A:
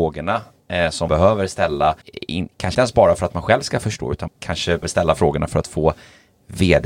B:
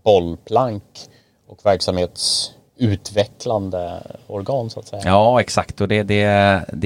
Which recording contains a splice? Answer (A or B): A